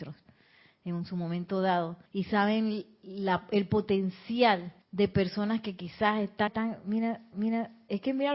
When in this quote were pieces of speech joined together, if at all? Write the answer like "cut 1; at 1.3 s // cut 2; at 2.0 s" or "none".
cut 1; at 2.1 s // cut 2; at 4.8 s // cut 3; at 6.5 s // cut 4; at 7.3 s